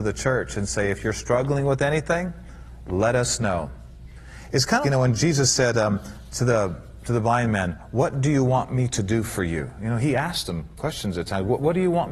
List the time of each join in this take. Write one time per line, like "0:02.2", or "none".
0:04.8